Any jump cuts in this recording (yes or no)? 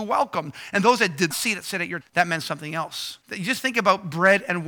yes